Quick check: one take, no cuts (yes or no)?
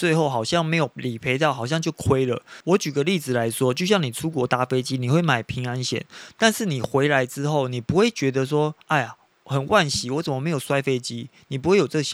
no